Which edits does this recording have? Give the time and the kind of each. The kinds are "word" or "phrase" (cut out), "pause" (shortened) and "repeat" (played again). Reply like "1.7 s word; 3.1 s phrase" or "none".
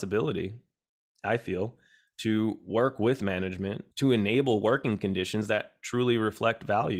3.9 s pause